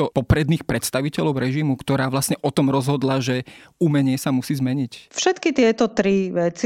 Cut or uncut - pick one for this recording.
uncut